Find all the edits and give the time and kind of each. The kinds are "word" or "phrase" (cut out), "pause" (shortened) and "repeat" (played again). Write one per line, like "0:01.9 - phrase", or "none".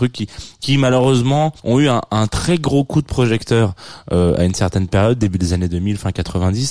0:01.6 - pause